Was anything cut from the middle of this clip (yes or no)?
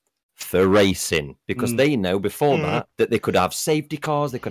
yes